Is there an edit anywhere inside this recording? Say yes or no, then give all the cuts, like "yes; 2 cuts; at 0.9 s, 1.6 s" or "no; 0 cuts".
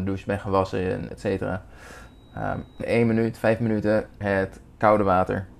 yes; 3 cuts; at 1.1 s, 2.8 s, 4.2 s